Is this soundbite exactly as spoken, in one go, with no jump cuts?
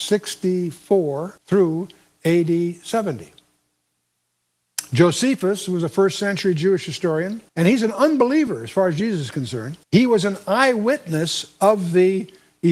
no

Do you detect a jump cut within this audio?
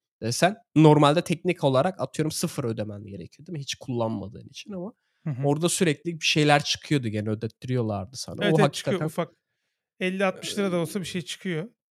no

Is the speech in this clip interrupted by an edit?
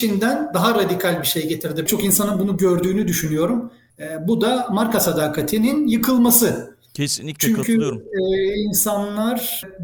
yes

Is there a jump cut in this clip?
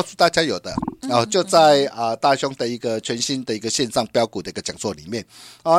yes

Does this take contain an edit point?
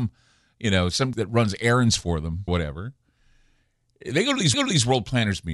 yes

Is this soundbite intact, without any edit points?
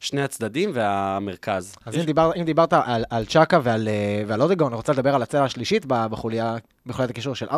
yes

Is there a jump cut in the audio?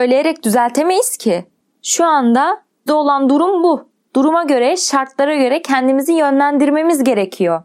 yes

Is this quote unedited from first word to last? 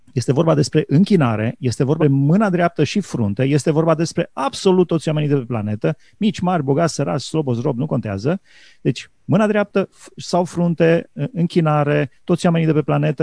no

